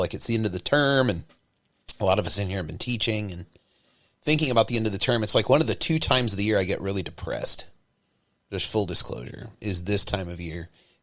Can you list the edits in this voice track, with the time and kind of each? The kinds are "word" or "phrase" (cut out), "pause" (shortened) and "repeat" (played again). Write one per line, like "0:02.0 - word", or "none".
none